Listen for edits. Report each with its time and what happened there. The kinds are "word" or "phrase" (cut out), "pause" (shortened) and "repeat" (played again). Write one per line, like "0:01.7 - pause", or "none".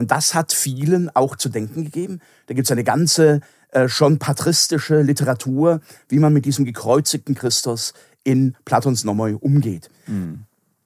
none

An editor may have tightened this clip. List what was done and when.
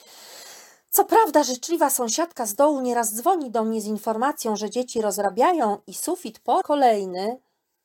0:06.6 - word

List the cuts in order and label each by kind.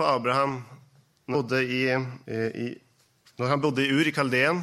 0:01.3 - word
0:02.2 - pause

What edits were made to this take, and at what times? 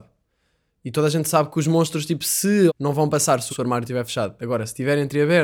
0:02.7 - word
0:03.5 - word

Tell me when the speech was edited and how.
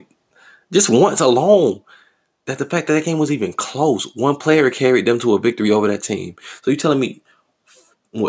none

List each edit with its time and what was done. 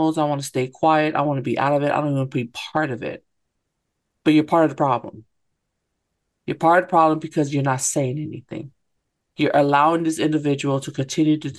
none

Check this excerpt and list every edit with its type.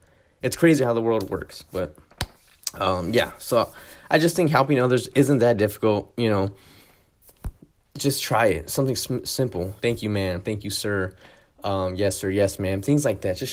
0:09.8 - phrase

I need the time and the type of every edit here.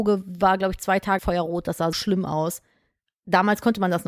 0:01.2 - word
0:01.9 - word

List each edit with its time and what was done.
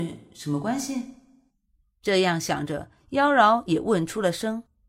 none

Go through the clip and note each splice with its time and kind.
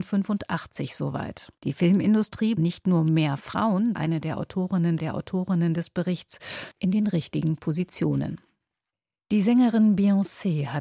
0:01.6 - pause
0:02.6 - word
0:03.9 - word
0:05.0 - repeat
0:06.7 - phrase
0:08.9 - pause

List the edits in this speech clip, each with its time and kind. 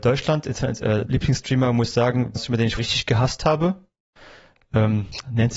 0:01.1 - word
0:02.4 - word
0:02.8 - word

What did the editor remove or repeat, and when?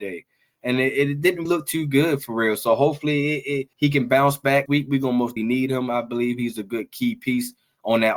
0:01.5 - word
0:03.7 - pause
0:04.7 - word
0:05.4 - word

